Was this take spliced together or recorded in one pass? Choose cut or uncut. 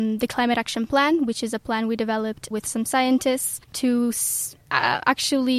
cut